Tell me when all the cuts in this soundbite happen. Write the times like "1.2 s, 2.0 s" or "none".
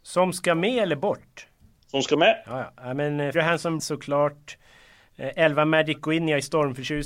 3.3 s, 3.8 s